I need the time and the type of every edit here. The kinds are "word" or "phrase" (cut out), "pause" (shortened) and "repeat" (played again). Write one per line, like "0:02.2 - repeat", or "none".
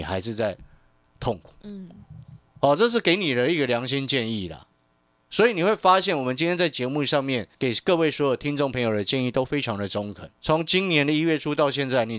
0:01.6 - pause
0:07.5 - pause
0:10.3 - pause

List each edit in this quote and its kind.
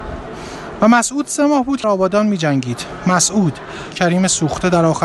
0:01.8 - word
0:03.9 - word

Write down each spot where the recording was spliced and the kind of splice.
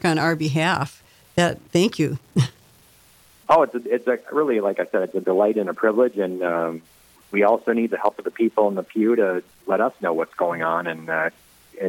0:01.7 - pause

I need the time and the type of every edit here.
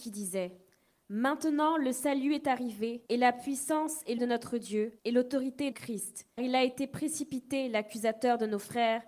0:03.1 - pause
0:04.2 - word
0:05.0 - pause
0:05.7 - word
0:06.4 - word

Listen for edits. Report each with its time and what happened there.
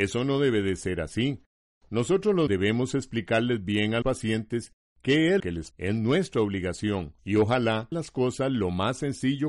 0:02.5 - word
0:04.0 - word
0:05.4 - word
0:05.7 - word
0:07.2 - pause
0:07.9 - word

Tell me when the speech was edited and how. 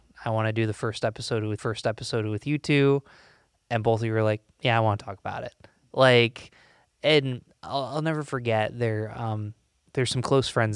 0:01.6 - repeat

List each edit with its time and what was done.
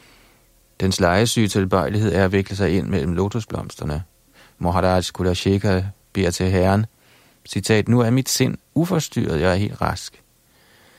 none

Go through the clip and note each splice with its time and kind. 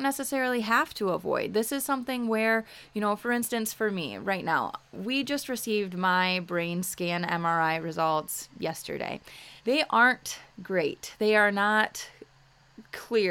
0:09.6 - pause

